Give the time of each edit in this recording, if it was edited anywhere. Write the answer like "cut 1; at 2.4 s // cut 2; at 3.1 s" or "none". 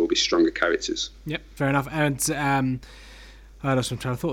cut 1; at 1.6 s